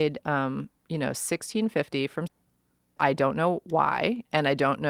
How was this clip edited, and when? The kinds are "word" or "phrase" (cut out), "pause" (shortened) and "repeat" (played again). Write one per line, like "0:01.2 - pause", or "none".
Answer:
0:02.3 - word
0:03.0 - word